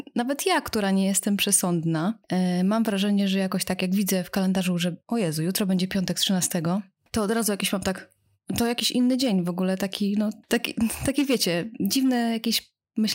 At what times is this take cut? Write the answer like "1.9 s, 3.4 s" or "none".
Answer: 5.0 s

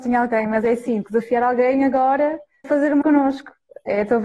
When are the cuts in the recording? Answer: 1.0 s, 2.6 s, 3.0 s

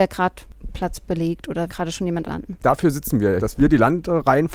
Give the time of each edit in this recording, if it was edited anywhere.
1.7 s, 2.2 s, 3.4 s

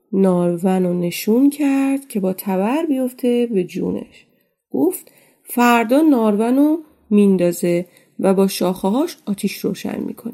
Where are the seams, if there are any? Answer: none

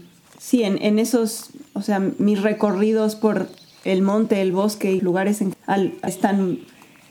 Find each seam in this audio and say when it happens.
1.7 s, 3.7 s, 5.0 s, 5.5 s, 6.1 s

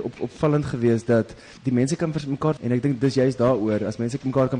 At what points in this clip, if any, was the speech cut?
1.6 s, 2.6 s

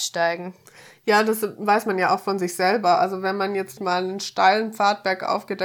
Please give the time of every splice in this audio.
3.8 s

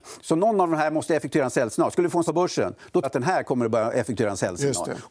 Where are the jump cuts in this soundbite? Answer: 2.3 s, 3.0 s

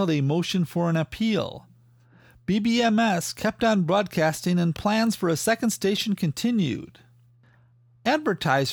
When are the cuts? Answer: none

